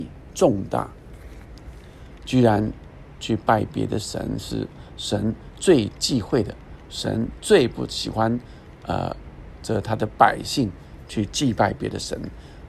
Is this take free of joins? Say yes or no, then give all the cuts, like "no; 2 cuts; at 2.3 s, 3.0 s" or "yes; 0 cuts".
yes; 0 cuts